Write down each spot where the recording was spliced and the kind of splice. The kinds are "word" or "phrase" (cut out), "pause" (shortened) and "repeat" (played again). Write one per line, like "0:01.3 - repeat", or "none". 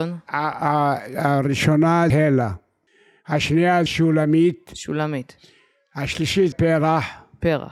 0:02.1 - word
0:03.9 - word
0:06.5 - word